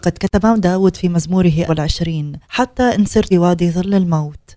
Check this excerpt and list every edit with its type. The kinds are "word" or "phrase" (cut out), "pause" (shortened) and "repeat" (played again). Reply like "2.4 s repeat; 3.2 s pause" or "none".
1.7 s word; 2.4 s pause; 3.3 s word